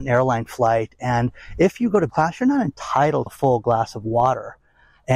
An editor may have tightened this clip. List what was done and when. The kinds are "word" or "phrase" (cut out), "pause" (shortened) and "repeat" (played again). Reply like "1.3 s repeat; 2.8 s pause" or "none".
2.1 s word; 3.3 s word